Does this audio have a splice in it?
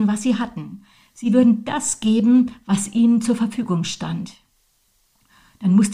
no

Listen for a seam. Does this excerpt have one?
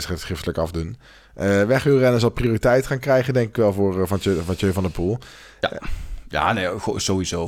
no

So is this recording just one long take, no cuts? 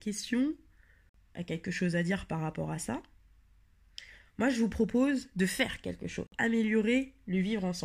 yes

